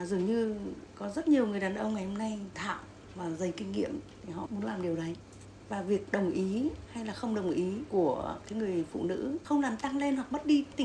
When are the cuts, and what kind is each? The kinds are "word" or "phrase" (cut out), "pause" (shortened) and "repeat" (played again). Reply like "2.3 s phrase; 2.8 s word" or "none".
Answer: 2.5 s word; 4.5 s word